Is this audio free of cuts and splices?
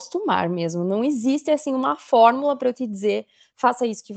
yes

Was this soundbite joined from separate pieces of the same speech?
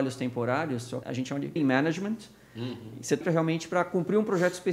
yes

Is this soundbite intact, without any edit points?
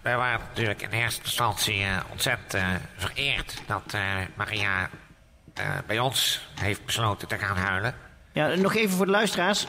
yes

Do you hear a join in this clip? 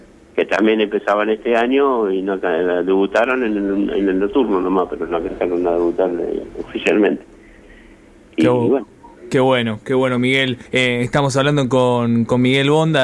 yes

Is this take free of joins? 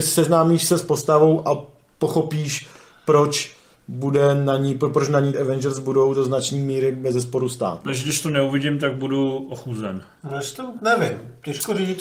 no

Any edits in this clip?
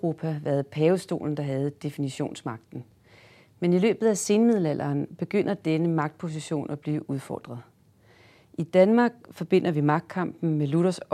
no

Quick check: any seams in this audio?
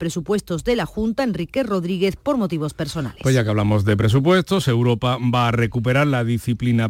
no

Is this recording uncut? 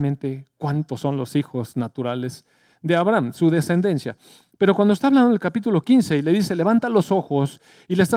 yes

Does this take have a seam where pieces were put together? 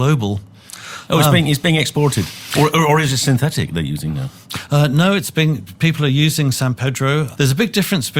no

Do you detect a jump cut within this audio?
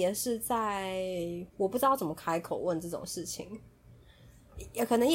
yes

